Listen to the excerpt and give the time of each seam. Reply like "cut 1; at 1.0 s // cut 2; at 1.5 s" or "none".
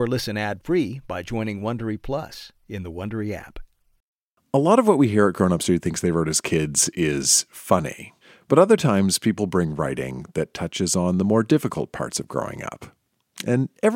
none